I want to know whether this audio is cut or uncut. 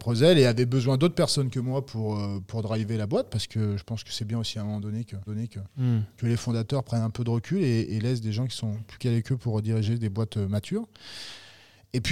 cut